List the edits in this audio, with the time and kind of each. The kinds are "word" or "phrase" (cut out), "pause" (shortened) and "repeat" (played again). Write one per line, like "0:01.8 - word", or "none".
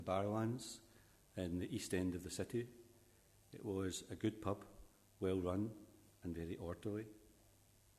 none